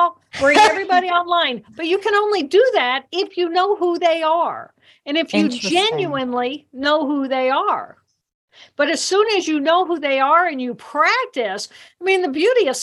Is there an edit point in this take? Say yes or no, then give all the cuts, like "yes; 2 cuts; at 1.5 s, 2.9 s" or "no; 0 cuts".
no; 0 cuts